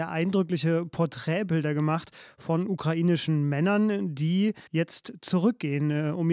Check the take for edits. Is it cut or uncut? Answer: cut